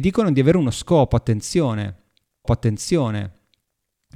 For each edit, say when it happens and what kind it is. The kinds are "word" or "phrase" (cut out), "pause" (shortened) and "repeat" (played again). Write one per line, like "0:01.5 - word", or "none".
0:02.4 - repeat